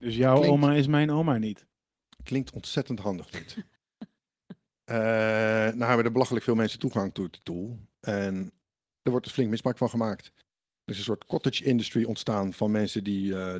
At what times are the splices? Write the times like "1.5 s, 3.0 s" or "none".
none